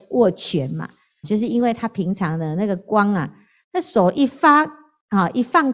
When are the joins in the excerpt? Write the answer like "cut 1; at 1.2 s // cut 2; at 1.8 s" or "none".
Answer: cut 1; at 1.2 s